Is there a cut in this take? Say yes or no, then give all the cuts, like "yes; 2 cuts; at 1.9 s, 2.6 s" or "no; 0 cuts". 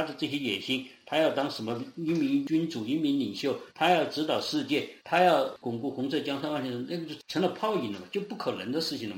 yes; 2 cuts; at 3.7 s, 5.0 s